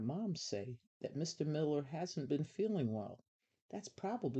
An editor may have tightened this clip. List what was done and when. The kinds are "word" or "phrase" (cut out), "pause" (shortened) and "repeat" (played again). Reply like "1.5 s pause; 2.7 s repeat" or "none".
none

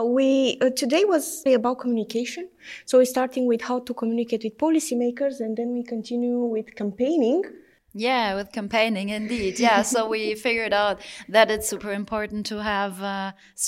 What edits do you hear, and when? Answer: 1.5 s word; 7.7 s pause

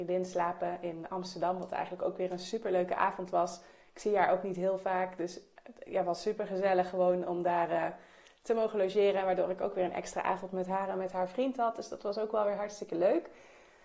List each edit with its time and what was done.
none

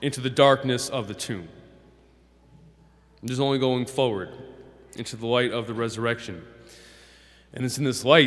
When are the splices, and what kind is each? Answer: none

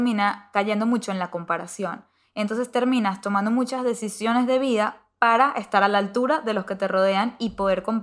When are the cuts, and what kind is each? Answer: none

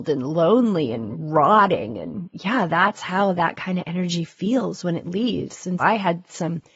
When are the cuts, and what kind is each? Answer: 5.8 s word

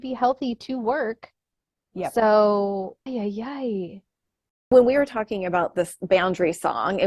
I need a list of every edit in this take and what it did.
3.1 s word

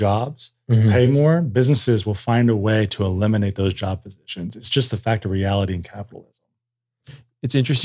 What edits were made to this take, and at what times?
none

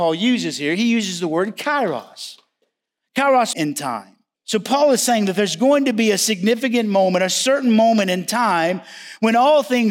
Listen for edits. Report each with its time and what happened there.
3.5 s phrase; 4.3 s pause

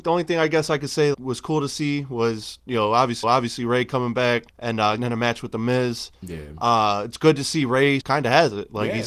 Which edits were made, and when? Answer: 1.1 s word; 3.2 s repeat; 4.5 s pause; 5.0 s word; 8.0 s word

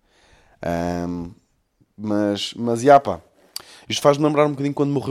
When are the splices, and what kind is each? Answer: none

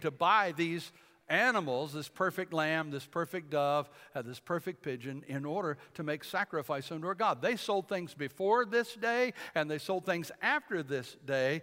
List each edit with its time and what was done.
none

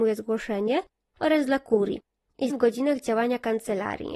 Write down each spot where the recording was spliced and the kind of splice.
2.5 s word

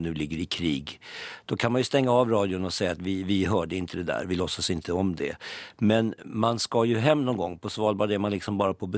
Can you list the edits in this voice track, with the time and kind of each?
none

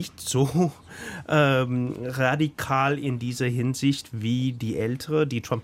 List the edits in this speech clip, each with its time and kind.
none

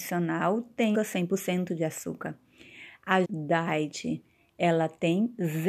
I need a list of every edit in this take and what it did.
0.9 s word; 3.2 s word

